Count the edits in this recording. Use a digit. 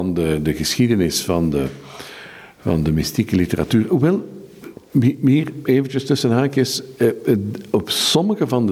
0